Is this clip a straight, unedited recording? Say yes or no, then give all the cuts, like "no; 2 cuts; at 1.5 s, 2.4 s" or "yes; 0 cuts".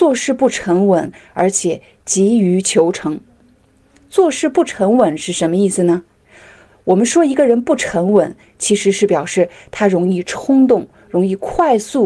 yes; 0 cuts